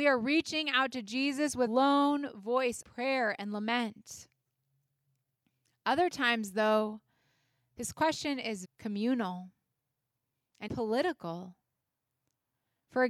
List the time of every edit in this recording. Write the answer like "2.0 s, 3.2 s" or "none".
1.7 s, 2.8 s, 8.6 s, 10.7 s